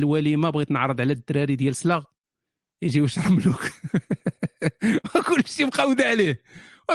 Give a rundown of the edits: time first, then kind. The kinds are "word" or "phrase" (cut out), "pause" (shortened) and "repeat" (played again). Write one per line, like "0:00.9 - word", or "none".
none